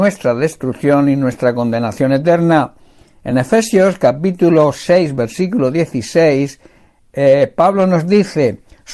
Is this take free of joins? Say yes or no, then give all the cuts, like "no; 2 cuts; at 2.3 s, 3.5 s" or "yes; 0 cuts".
yes; 0 cuts